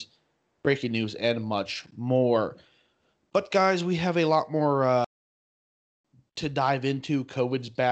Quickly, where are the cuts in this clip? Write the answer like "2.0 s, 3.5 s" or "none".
none